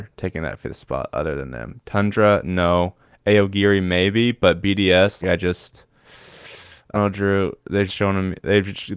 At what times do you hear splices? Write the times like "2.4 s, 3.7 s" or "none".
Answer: 5.2 s, 6.9 s, 7.9 s